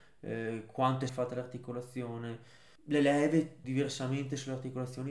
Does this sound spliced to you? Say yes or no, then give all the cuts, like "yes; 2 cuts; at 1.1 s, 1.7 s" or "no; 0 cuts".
yes; 3 cuts; at 1.1 s, 2.8 s, 3.6 s